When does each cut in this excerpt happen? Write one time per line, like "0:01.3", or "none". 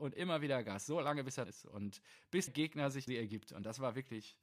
0:01.5
0:02.5
0:03.1